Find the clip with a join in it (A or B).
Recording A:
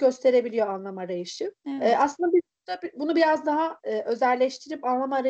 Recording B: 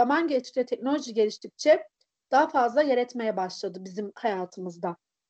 A